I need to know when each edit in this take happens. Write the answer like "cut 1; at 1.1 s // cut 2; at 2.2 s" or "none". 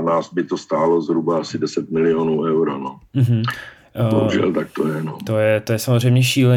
cut 1; at 3.1 s